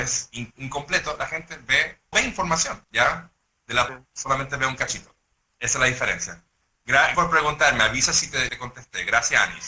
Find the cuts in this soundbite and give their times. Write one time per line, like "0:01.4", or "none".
0:02.1
0:02.8
0:03.9
0:07.1
0:08.5